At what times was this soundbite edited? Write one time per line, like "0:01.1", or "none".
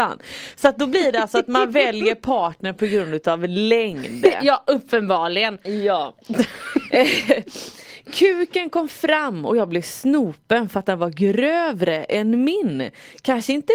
none